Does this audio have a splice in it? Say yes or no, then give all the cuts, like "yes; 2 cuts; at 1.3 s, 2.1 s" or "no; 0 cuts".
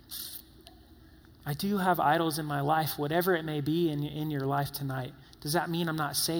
no; 0 cuts